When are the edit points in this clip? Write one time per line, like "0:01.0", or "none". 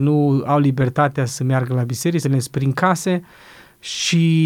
0:02.2